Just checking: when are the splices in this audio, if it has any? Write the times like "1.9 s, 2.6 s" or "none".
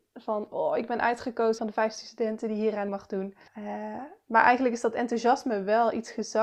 1.6 s, 2.9 s, 3.5 s